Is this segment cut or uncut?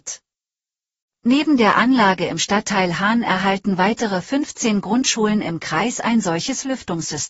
uncut